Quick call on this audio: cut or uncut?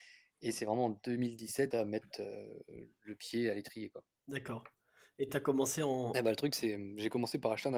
cut